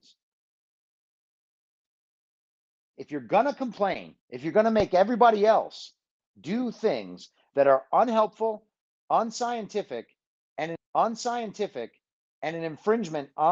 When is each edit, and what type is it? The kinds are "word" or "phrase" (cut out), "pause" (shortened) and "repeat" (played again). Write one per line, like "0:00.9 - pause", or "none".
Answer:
0:04.2 - pause
0:10.8 - repeat